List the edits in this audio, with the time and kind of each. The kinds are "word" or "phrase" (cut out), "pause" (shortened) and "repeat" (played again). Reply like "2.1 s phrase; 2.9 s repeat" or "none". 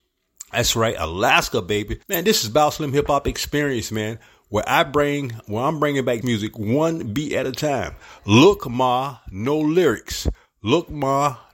2.0 s pause; 6.2 s word